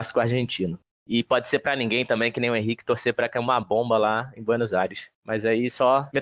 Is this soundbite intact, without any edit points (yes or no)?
yes